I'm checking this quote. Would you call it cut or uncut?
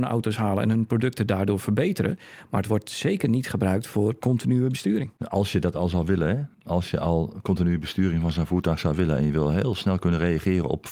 cut